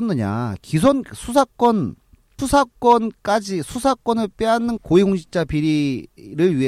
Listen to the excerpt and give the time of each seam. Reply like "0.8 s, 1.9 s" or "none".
2.4 s, 4.8 s